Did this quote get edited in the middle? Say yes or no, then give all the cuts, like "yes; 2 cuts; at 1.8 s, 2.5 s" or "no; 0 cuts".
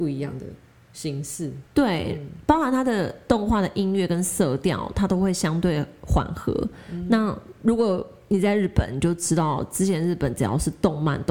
yes; 1 cut; at 1.7 s